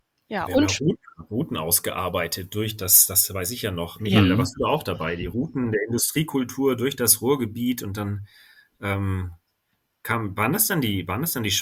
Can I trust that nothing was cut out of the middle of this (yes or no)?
yes